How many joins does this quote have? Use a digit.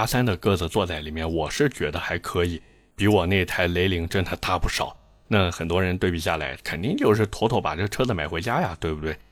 0